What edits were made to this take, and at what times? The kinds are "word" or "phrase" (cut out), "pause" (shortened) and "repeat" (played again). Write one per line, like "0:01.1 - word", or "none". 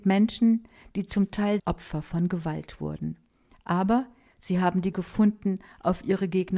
0:01.6 - word
0:04.9 - word